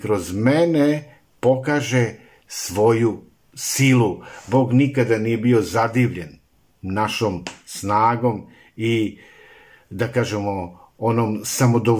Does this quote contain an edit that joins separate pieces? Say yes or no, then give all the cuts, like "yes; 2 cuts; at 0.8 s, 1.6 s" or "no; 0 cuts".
no; 0 cuts